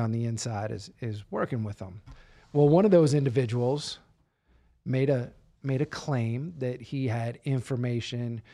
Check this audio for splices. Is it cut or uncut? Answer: uncut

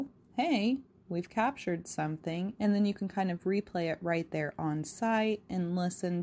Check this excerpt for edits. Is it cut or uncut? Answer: uncut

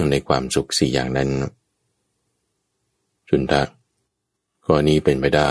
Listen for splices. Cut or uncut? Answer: uncut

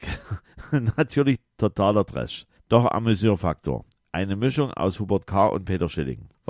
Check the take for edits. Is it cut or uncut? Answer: uncut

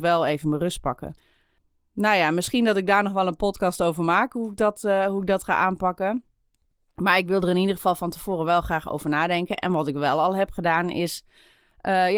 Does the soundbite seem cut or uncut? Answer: uncut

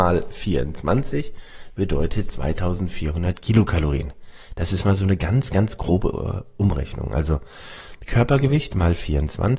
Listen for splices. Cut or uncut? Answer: uncut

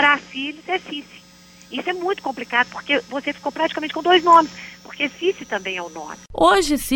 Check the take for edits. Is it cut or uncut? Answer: uncut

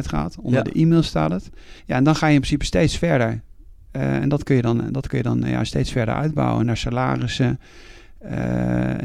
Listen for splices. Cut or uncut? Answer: cut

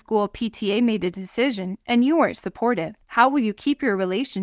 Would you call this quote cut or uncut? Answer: cut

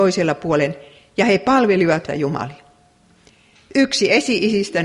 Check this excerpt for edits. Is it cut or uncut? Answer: cut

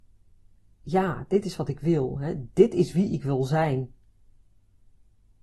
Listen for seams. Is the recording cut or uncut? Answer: uncut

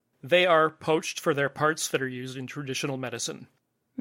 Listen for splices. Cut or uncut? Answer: uncut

